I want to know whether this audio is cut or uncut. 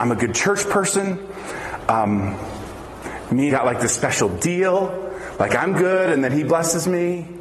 cut